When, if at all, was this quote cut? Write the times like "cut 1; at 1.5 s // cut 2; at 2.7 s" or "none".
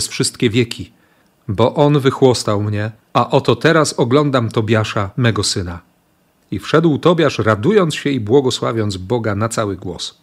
cut 1; at 3.0 s